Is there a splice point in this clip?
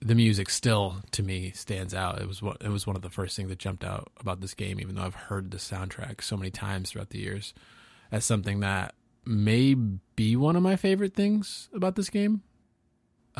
no; 0 cuts

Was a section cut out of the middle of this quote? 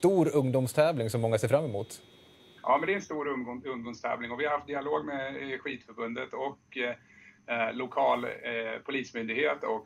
no; 0 cuts

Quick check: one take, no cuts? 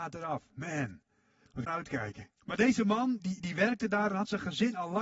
no; 3 cuts; at 1.7 s, 2.4 s, 3.2 s

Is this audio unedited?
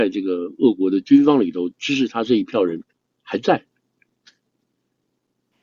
yes; 0 cuts

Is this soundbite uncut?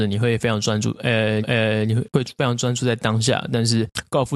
no; 1 cut; at 1.4 s

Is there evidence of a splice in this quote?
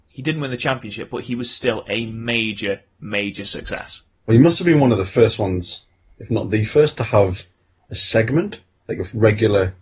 no; 0 cuts

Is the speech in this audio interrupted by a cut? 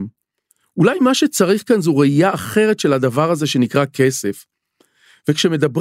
no; 0 cuts

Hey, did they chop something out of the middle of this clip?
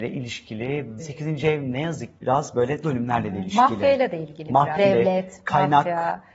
yes; 4 cuts; at 1.0 s, 2.2 s, 2.8 s, 4.8 s

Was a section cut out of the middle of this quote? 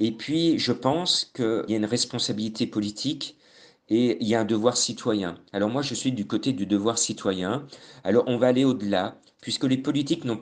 no; 0 cuts

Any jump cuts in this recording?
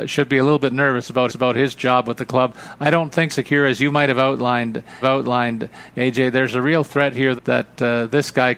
yes; 4 cuts; at 1.3 s, 3.3 s, 5.0 s, 7.4 s

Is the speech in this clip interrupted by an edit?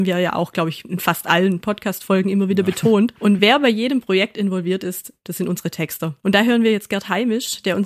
no; 0 cuts

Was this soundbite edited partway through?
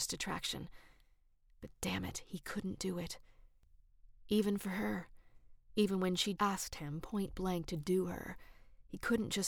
yes; 1 cut; at 6.4 s

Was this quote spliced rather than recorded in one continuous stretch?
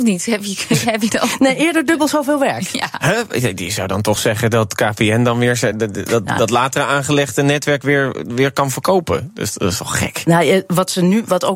no; 0 cuts

